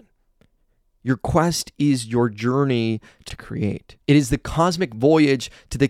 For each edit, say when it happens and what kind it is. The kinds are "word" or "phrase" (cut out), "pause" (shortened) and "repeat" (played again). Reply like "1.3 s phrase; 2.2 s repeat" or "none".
3.3 s phrase; 4.0 s pause